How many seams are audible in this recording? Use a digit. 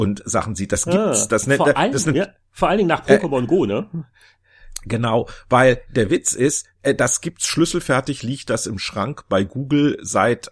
0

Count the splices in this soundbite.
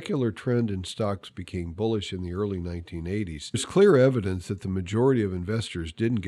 1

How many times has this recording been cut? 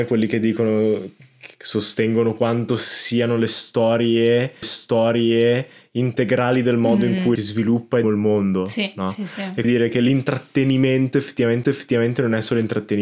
5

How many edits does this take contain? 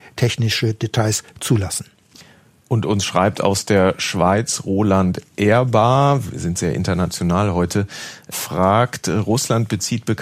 1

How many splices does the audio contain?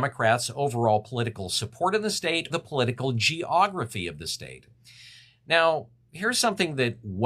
1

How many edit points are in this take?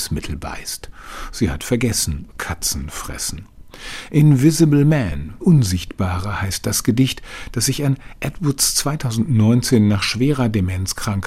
2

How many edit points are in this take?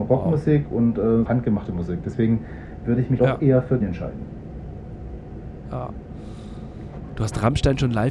3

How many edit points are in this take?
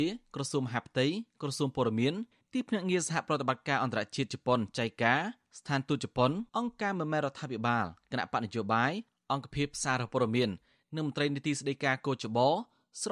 1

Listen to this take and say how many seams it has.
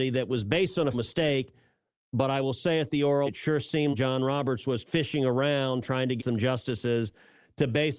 5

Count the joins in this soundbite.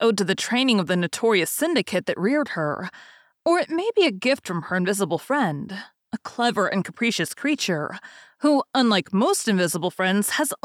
0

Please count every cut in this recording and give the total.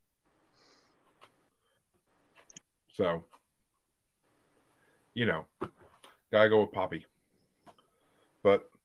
0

